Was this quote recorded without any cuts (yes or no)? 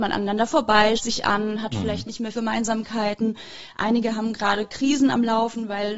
no